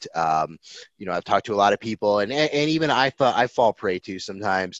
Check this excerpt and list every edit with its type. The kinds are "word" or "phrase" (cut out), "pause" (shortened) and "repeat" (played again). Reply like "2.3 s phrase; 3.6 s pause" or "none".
none